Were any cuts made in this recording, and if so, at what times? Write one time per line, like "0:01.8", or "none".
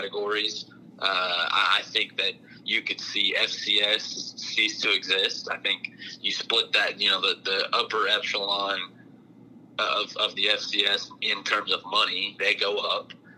none